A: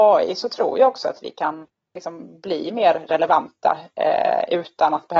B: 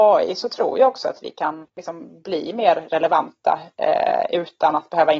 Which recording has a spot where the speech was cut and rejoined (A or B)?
B